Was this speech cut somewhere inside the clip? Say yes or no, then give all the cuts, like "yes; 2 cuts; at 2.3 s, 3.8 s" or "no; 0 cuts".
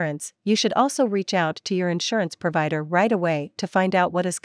no; 0 cuts